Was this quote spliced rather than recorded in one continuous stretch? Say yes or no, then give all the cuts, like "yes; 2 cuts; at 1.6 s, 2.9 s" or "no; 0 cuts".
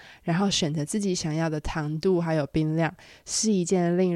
no; 0 cuts